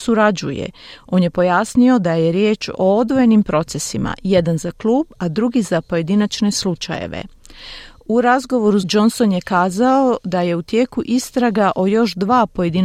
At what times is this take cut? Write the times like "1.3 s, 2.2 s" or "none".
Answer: 8.8 s